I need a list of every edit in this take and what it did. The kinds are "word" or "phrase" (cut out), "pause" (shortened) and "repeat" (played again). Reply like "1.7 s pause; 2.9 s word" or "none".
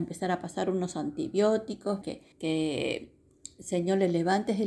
2.0 s word; 2.3 s pause